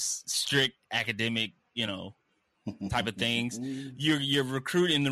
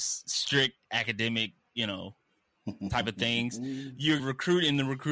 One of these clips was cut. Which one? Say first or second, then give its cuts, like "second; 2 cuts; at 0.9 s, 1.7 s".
second; 1 cut; at 4.2 s